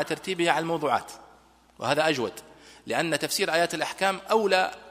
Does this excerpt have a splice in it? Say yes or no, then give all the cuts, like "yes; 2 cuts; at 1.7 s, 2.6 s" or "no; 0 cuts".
no; 0 cuts